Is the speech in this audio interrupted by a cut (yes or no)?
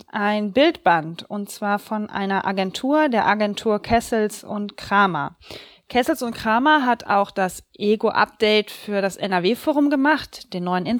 no